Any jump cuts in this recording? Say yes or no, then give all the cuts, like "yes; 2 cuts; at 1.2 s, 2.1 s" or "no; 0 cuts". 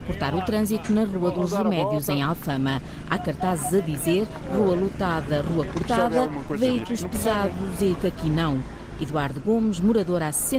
yes; 1 cut; at 8.0 s